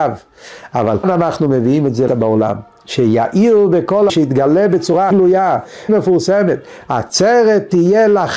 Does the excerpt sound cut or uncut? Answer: cut